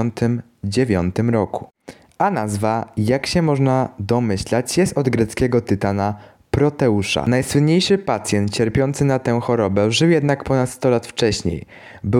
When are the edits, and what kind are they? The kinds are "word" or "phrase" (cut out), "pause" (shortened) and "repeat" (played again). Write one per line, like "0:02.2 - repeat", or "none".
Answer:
none